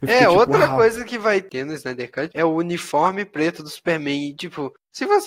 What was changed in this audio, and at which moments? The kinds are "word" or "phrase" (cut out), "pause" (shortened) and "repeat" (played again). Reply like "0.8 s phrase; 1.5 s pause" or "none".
2.3 s word